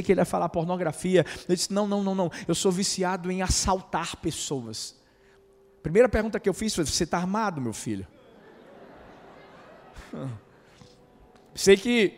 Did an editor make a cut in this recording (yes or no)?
no